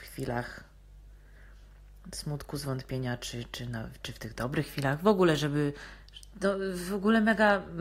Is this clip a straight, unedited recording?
yes; 0 cuts

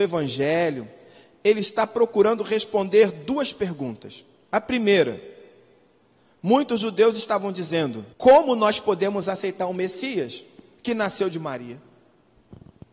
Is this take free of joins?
no; 1 cut; at 8.1 s

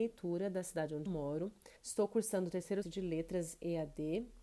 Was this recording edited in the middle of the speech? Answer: yes; 3 cuts; at 1.1 s, 1.8 s, 2.8 s

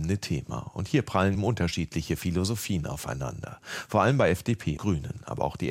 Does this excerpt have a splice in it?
yes; 2 cuts; at 1.3 s, 4.8 s

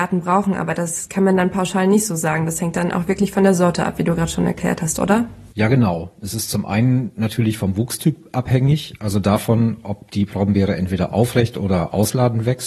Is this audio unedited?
yes; 0 cuts

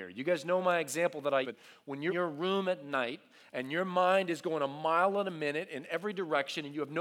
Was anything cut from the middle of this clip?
yes; 2 cuts; at 1.4 s, 2.1 s

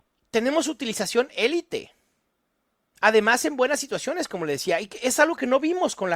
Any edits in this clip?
no; 0 cuts

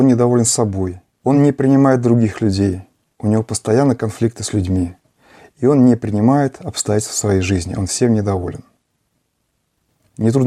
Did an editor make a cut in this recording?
no; 0 cuts

